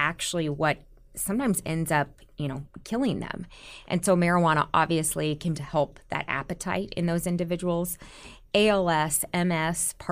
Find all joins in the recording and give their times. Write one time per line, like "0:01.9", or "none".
0:05.5